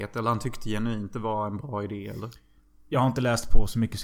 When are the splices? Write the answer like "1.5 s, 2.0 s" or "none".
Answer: none